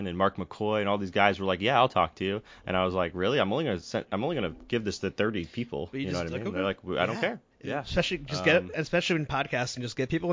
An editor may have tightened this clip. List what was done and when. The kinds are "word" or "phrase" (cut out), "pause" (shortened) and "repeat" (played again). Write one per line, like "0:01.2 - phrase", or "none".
0:07.5 - pause